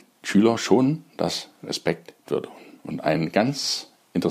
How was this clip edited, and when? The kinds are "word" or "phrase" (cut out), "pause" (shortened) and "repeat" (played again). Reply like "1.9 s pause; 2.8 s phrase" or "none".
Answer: 2.3 s phrase